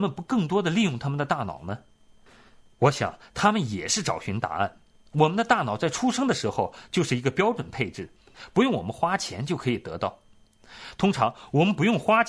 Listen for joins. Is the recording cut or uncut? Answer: uncut